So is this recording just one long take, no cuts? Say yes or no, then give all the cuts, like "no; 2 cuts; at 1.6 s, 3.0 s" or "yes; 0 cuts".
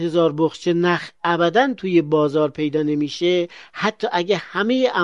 yes; 0 cuts